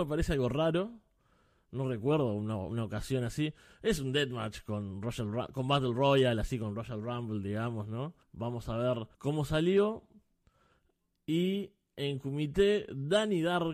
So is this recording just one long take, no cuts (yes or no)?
no